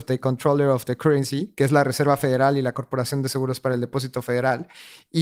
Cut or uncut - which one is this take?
uncut